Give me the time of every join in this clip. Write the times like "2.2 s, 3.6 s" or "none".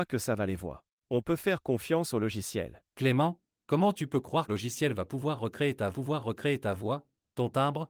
4.5 s, 5.9 s